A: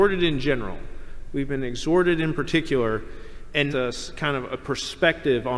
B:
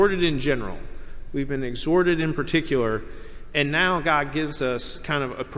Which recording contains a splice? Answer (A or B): A